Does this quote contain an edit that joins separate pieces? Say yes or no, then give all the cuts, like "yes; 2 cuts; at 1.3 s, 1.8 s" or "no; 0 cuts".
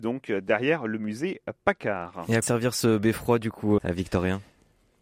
yes; 2 cuts; at 2.4 s, 3.8 s